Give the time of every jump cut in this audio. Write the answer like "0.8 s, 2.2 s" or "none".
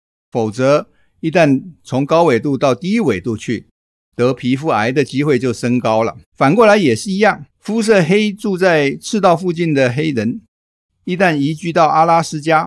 6.3 s, 7.5 s